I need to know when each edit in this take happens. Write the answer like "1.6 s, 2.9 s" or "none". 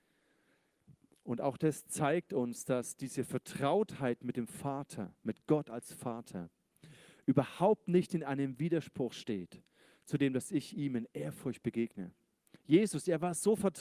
none